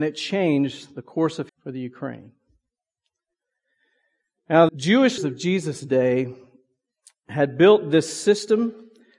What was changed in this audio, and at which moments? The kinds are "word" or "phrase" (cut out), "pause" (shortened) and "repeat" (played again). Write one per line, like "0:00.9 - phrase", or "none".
0:01.5 - word
0:04.7 - word
0:05.2 - word